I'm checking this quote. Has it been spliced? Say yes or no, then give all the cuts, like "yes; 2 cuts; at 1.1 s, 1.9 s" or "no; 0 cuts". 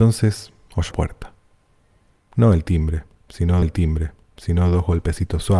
yes; 2 cuts; at 0.9 s, 3.6 s